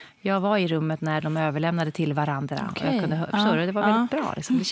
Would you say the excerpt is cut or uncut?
uncut